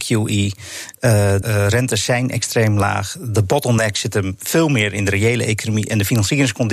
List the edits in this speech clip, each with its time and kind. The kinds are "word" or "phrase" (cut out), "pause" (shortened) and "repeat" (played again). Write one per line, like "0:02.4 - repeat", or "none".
0:01.4 - word